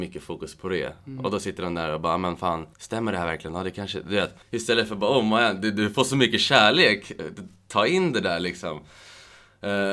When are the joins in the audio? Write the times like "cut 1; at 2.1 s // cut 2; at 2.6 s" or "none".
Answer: cut 1; at 2.7 s // cut 2; at 4.4 s